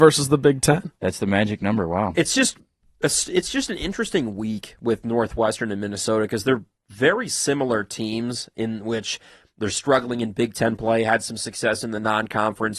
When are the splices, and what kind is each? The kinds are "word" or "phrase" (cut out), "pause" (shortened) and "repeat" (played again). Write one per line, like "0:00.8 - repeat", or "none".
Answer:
none